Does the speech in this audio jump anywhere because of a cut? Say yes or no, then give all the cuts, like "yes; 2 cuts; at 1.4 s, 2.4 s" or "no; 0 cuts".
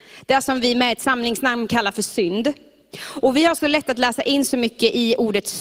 no; 0 cuts